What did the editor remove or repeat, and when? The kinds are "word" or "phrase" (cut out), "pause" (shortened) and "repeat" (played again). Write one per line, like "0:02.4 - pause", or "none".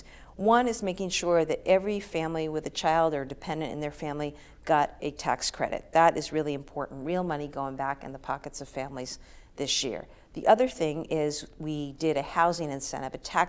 none